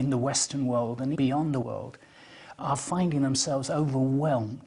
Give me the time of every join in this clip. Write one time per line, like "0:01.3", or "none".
0:01.2
0:01.6
0:02.6